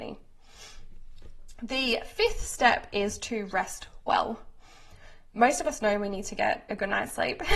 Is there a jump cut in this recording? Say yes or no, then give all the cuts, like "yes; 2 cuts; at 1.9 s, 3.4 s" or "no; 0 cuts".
no; 0 cuts